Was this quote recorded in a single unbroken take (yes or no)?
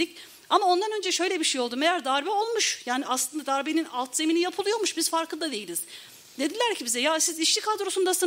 yes